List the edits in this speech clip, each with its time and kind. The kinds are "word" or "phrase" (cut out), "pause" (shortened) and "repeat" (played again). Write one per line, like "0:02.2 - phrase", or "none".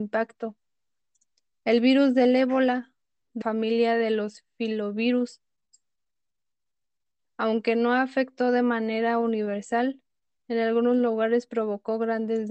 0:03.4 - word